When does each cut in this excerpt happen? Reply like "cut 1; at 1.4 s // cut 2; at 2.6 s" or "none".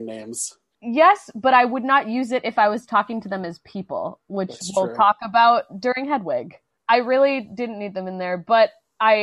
none